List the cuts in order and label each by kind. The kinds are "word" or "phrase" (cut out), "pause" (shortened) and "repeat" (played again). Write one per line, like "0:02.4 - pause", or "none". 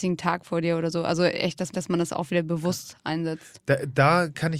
0:01.7 - repeat